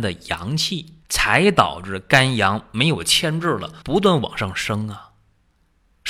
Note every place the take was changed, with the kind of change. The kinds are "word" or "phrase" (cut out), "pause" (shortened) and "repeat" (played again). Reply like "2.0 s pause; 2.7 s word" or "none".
1.0 s pause; 3.8 s pause